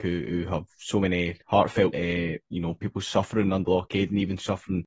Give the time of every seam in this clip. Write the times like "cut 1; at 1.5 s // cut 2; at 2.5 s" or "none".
cut 1; at 1.9 s // cut 2; at 3.6 s